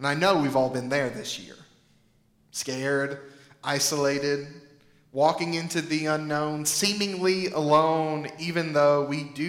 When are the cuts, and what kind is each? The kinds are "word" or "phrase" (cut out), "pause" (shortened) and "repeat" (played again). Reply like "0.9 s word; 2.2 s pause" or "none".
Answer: none